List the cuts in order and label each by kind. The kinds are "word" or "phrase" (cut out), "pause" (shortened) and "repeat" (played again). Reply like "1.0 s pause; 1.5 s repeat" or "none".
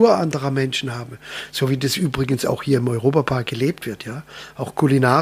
none